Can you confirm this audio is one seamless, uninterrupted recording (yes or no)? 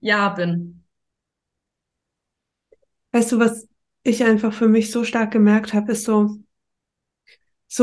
yes